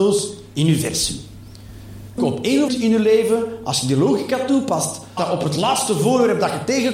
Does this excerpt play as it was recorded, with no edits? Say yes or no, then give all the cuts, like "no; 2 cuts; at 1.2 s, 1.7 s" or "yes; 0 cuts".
no; 3 cuts; at 2.2 s, 2.7 s, 5.2 s